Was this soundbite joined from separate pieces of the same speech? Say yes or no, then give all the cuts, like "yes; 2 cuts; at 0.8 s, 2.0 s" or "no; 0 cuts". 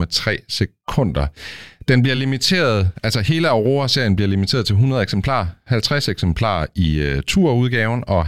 no; 0 cuts